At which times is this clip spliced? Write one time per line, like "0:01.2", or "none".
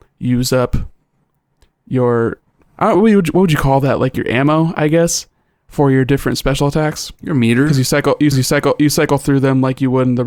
0:02.9
0:08.3